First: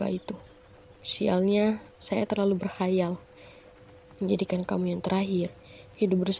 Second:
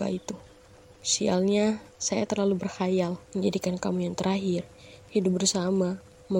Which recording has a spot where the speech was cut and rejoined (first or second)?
second